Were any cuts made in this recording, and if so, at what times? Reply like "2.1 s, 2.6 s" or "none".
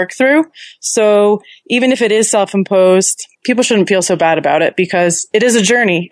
3.3 s